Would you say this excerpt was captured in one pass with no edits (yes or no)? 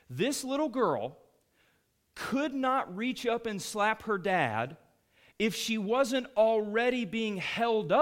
yes